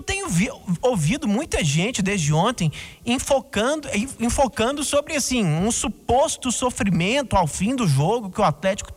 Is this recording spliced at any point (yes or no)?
no